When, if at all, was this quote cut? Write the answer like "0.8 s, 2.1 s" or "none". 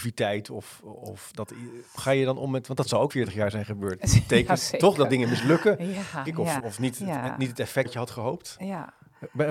2.0 s, 3.1 s, 6.2 s, 6.6 s, 7.8 s